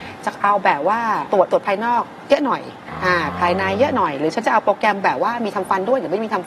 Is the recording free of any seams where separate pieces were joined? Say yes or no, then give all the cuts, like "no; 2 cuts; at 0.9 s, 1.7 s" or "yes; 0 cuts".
no; 1 cut; at 1.5 s